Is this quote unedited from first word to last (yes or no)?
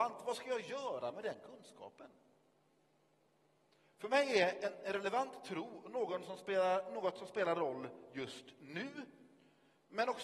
yes